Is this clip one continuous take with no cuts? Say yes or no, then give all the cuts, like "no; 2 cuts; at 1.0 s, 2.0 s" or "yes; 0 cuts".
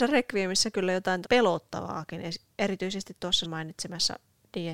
no; 2 cuts; at 1.2 s, 3.4 s